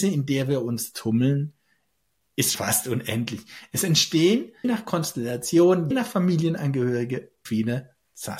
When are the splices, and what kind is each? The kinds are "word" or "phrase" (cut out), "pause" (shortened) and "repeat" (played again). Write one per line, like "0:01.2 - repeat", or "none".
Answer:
0:02.5 - word
0:04.6 - word
0:05.9 - word
0:07.5 - word